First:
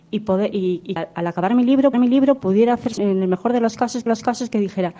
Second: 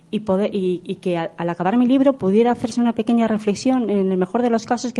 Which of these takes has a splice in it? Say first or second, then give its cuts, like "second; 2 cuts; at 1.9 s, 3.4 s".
first; 4 cuts; at 1.0 s, 1.9 s, 3.0 s, 4.1 s